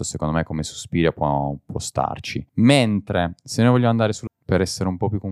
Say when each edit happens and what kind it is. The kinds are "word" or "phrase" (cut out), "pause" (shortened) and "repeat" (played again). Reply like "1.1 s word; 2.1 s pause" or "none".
2.5 s pause; 4.3 s phrase